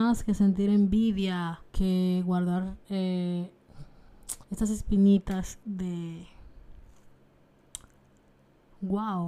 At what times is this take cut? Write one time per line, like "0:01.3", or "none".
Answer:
0:01.7
0:04.4